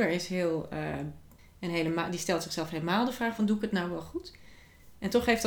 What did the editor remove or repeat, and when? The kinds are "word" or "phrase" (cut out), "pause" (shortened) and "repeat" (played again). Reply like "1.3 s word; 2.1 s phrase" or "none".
none